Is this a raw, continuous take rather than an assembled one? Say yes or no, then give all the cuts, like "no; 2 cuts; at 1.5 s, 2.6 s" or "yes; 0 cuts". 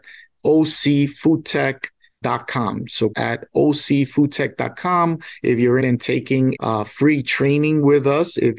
no; 4 cuts; at 2.2 s, 3.1 s, 5.8 s, 6.6 s